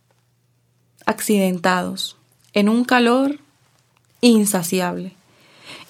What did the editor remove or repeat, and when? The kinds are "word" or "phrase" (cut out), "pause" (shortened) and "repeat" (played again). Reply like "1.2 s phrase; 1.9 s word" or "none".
2.4 s pause